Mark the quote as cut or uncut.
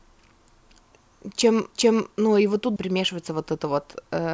cut